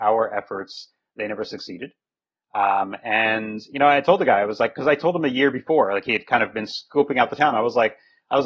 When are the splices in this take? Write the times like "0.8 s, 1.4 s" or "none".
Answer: none